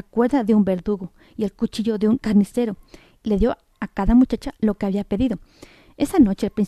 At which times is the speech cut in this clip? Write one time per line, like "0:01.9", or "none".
none